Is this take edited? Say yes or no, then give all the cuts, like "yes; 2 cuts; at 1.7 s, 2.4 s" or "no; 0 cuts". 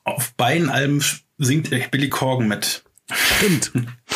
no; 0 cuts